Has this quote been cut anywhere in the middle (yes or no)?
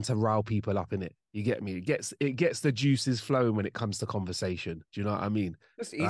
yes